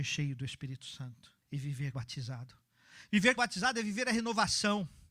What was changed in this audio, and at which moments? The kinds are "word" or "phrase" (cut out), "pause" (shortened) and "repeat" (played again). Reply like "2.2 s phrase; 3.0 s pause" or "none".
1.4 s pause; 1.9 s word; 3.4 s word